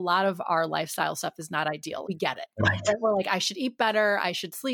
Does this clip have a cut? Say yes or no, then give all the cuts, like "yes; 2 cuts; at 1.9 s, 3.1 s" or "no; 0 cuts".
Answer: yes; 1 cut; at 2.0 s